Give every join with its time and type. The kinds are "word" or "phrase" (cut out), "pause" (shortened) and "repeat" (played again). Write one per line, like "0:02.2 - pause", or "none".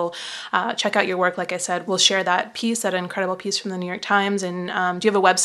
0:01.8 - word